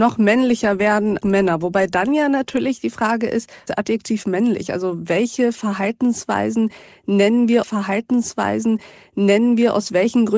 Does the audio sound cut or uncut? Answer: cut